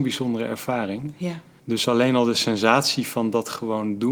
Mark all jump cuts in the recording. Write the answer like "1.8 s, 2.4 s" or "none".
1.6 s